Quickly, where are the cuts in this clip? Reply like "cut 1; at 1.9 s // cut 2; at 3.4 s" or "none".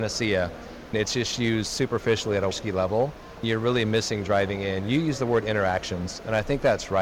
cut 1; at 0.9 s // cut 2; at 2.5 s // cut 3; at 3.4 s